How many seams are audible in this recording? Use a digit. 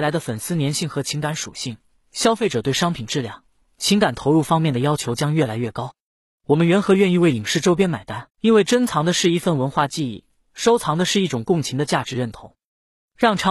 1